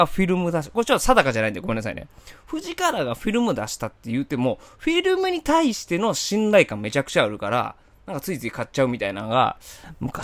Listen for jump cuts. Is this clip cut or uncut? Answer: uncut